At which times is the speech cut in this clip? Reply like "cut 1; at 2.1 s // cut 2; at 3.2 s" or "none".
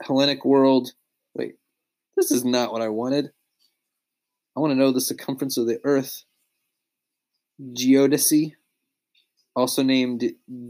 none